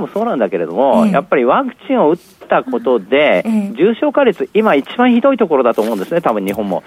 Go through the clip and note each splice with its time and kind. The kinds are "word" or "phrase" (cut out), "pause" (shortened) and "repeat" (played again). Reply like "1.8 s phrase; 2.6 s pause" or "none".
none

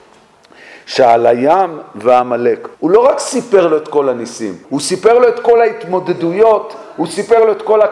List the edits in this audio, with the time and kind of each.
2.7 s pause; 4.6 s pause

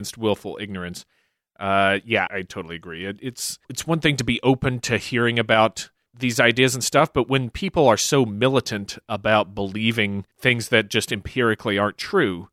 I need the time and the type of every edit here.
2.3 s word; 3.6 s pause; 10.3 s pause

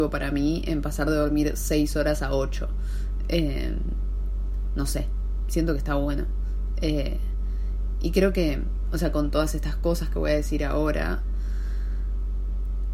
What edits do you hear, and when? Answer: none

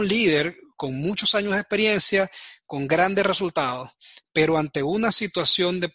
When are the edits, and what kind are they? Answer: none

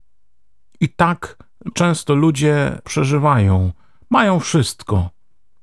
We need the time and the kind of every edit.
1.7 s word; 2.8 s word

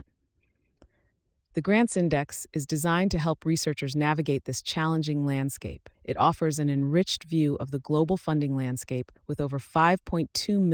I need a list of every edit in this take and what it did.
5.9 s pause; 9.2 s pause

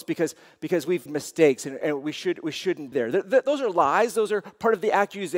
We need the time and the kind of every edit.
1.1 s phrase; 1.8 s word; 2.9 s word

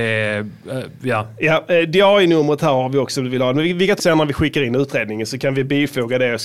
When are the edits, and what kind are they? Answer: 4.0 s word

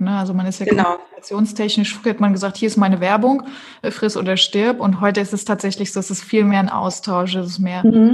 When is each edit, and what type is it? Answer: none

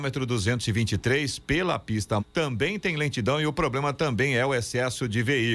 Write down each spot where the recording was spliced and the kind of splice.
2.2 s word

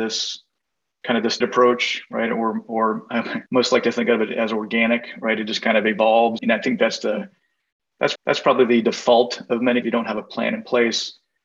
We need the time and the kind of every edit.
1.4 s word; 3.5 s pause; 6.4 s word; 8.2 s repeat; 9.8 s phrase

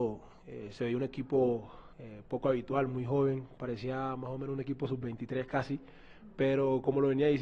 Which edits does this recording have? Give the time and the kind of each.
1.9 s pause

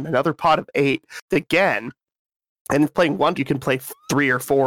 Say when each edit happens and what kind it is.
1.3 s word; 2.8 s word; 3.3 s word

